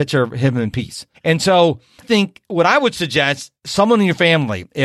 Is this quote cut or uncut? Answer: cut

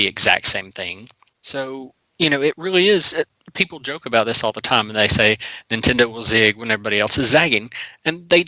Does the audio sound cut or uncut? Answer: uncut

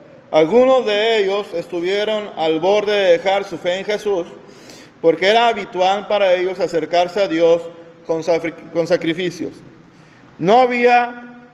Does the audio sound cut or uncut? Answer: uncut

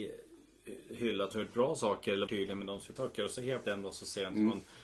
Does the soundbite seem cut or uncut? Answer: cut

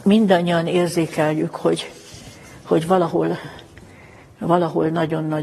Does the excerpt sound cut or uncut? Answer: uncut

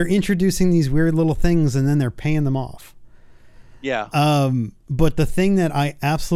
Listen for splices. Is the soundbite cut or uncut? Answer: cut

